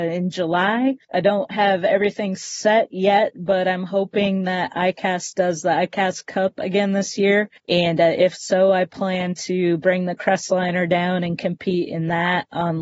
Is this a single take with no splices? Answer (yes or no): no